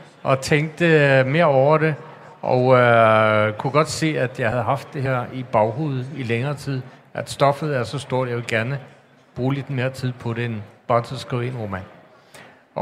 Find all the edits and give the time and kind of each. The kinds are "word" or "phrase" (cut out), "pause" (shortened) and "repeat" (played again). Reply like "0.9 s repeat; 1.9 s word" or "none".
none

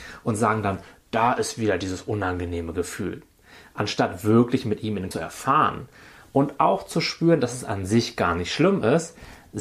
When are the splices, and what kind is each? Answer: 5.1 s phrase

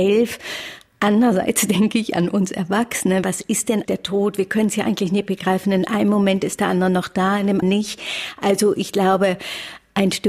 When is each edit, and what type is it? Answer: 3.8 s word; 7.6 s word

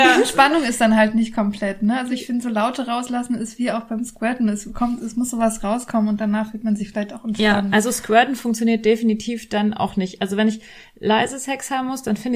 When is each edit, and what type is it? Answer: none

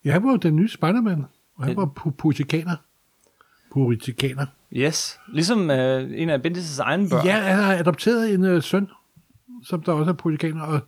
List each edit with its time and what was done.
none

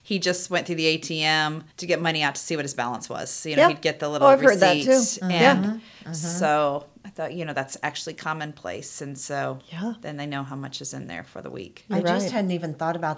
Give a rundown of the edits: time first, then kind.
1.7 s pause

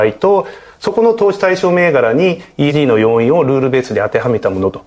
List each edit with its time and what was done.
2.7 s word

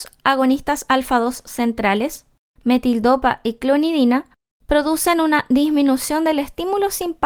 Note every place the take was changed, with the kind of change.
none

